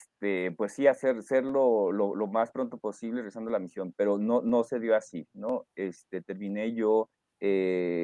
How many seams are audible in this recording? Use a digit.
1